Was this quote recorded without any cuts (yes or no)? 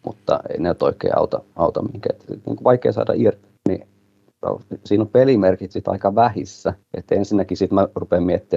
no